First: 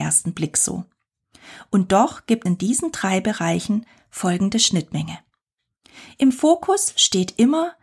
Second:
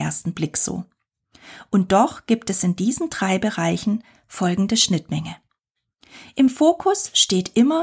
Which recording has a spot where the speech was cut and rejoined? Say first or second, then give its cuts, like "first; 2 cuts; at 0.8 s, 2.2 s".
first; 1 cut; at 2.5 s